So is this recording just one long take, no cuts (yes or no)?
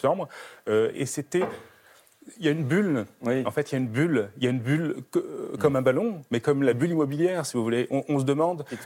no